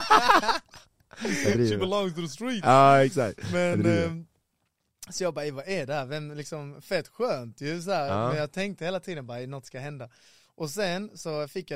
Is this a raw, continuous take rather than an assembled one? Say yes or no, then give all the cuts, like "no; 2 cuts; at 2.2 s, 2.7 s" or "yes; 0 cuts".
yes; 0 cuts